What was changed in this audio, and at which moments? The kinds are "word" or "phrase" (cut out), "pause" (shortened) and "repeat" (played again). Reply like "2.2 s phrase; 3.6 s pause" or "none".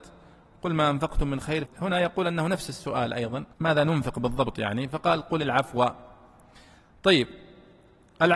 1.7 s word; 3.5 s pause